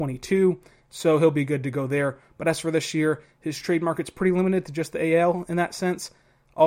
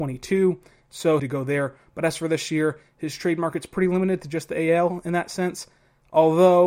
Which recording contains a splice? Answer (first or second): second